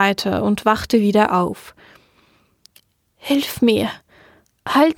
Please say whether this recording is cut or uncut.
uncut